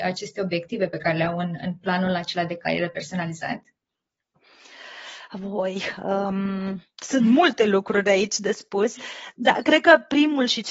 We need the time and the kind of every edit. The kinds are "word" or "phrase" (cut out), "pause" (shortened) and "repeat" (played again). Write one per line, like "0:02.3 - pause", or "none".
none